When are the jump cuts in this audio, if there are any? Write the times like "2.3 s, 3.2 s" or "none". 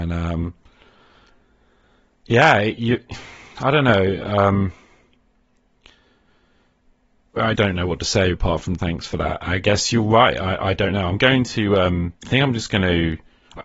7.6 s, 8.3 s, 8.8 s, 12.2 s